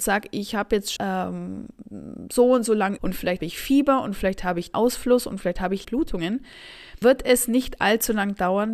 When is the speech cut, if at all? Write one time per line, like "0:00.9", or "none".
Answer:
0:01.0
0:03.0
0:03.4
0:04.7
0:05.8
0:07.0